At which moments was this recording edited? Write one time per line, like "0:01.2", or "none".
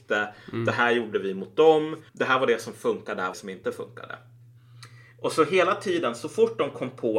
0:01.1
0:02.1
0:03.3